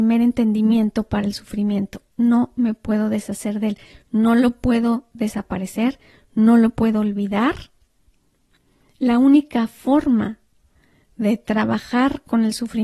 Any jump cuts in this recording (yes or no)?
no